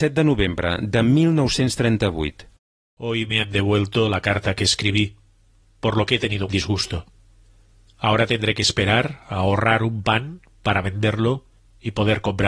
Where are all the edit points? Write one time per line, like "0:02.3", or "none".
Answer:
0:06.5